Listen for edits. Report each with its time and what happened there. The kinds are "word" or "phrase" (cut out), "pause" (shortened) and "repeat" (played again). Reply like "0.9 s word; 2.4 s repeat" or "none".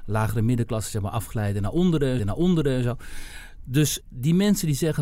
2.2 s repeat; 4.0 s word